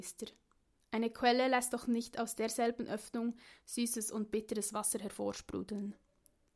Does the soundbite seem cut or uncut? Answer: uncut